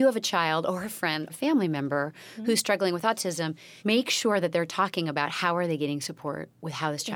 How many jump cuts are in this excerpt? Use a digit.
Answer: 2